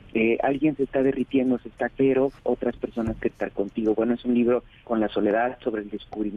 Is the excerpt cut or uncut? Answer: cut